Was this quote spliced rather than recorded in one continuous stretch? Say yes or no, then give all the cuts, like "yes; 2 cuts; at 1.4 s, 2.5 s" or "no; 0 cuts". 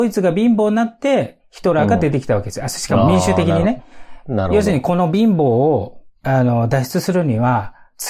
no; 0 cuts